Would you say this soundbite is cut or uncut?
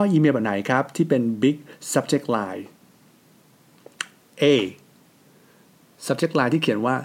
uncut